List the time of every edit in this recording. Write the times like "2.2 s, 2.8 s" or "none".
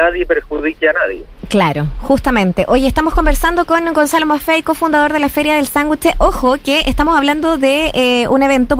none

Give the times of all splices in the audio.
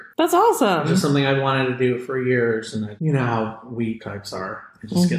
3.0 s, 4.0 s

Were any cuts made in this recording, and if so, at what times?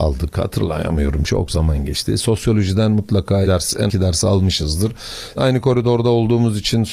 1.2 s, 3.4 s, 3.9 s, 5.4 s

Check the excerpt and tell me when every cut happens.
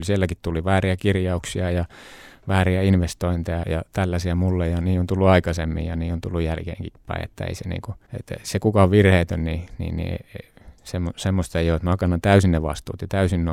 3.6 s, 8.1 s

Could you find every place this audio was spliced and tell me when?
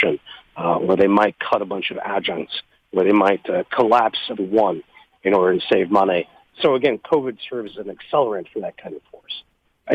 4.4 s

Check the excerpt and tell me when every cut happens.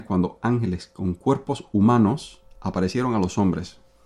2.5 s

